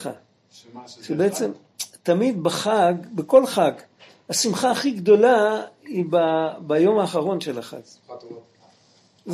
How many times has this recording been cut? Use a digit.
0